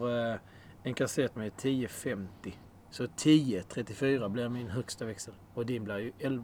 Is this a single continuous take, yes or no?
no